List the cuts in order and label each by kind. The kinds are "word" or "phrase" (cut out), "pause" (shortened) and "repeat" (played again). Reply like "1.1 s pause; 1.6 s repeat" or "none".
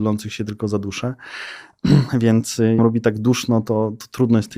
2.8 s phrase